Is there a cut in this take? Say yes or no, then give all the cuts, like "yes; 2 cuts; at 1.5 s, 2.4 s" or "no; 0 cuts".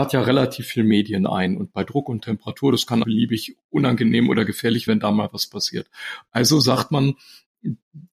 yes; 2 cuts; at 3.0 s, 4.9 s